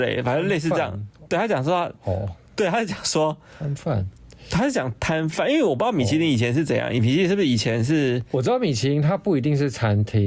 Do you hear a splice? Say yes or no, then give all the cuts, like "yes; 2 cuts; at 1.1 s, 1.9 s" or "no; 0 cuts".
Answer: no; 0 cuts